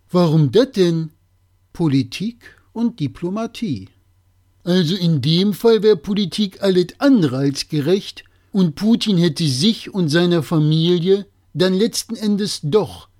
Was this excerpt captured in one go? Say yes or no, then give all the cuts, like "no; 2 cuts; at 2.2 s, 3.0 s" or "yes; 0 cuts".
yes; 0 cuts